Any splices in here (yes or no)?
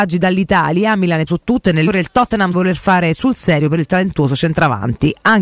yes